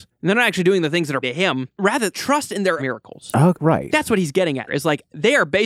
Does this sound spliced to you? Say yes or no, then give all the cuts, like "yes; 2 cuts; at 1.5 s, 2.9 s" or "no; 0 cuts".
yes; 5 cuts; at 1.2 s, 2.1 s, 2.8 s, 3.6 s, 4.7 s